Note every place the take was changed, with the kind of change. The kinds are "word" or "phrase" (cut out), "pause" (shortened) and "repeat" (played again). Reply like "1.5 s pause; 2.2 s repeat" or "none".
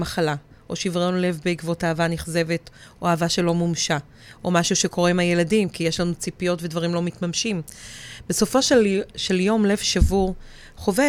none